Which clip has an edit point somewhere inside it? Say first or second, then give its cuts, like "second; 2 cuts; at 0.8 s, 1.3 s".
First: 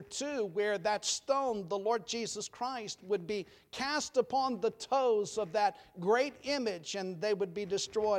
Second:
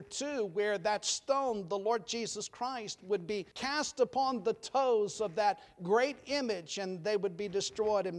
second; 1 cut; at 3.5 s